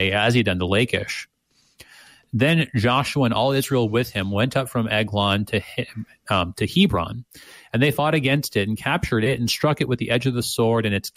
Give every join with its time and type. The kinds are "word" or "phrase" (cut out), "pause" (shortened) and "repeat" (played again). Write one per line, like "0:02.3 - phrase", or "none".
none